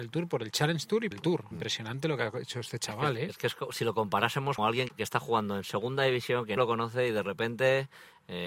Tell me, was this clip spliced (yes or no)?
yes